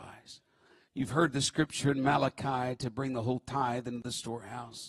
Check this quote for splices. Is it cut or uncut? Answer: uncut